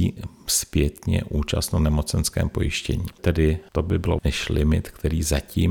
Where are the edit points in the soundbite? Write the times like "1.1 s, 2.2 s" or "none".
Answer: 4.2 s